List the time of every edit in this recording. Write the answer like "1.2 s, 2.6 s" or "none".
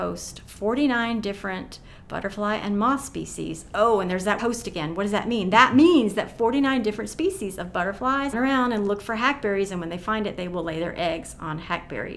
4.4 s, 8.3 s